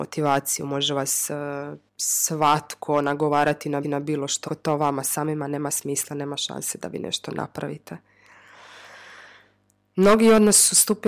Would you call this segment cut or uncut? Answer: cut